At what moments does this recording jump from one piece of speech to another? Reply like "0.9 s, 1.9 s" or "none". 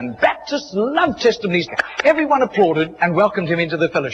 1.7 s